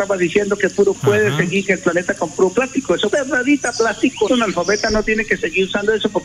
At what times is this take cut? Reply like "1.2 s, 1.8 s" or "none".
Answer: 0.9 s, 3.1 s, 4.3 s